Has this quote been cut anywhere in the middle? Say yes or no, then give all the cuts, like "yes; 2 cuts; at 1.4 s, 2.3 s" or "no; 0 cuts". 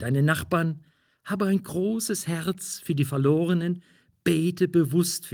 no; 0 cuts